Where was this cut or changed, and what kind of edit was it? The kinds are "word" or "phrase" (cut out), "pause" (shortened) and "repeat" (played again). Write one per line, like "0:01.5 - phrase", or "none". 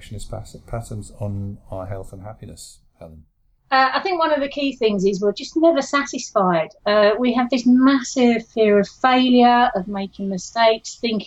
none